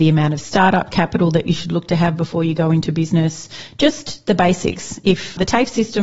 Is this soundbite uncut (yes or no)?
yes